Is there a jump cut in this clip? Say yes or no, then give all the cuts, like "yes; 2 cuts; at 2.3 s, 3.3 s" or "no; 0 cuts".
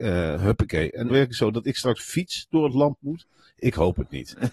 yes; 2 cuts; at 1.1 s, 2.0 s